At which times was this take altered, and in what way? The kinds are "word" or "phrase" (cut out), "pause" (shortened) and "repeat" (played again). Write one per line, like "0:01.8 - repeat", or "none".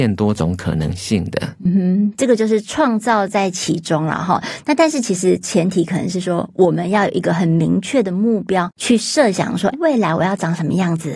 0:09.7 - word